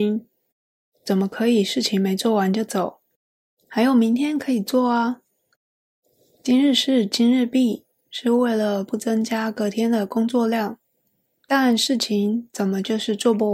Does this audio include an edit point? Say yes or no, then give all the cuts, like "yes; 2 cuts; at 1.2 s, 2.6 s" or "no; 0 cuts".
no; 0 cuts